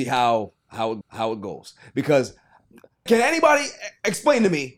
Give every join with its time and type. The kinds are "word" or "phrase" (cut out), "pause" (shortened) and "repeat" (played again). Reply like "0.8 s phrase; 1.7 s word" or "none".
1.0 s repeat; 3.1 s word

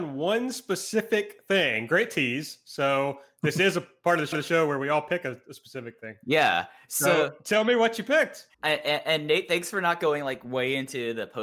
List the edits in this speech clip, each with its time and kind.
4.3 s repeat; 8.5 s pause

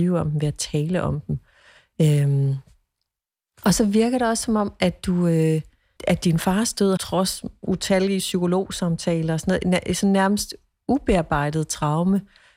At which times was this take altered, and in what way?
6.0 s word; 7.0 s phrase

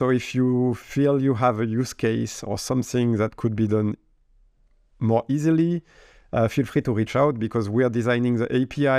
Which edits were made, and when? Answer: none

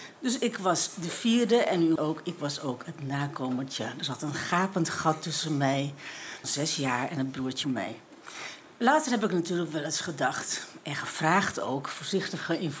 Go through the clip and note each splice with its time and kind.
2.0 s word; 6.4 s word; 7.6 s word

